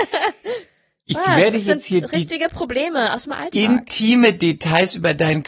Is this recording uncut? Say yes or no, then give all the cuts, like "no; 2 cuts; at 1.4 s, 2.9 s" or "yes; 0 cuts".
yes; 0 cuts